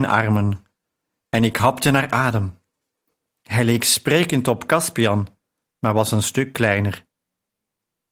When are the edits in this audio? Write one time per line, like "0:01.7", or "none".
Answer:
none